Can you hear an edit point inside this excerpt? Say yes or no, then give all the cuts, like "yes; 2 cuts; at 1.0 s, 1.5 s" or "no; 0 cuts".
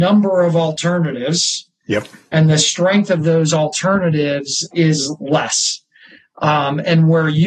no; 0 cuts